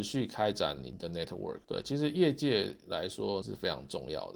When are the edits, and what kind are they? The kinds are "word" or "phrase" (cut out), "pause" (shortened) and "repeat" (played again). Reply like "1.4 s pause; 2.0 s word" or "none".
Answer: 3.4 s word